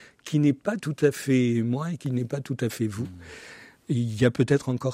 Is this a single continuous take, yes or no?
yes